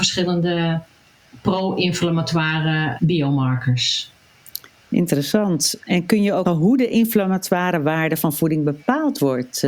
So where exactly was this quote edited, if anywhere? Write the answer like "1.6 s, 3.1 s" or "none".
3.0 s, 6.5 s